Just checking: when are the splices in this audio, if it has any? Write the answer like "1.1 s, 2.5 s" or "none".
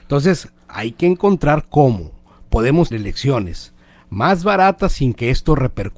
2.9 s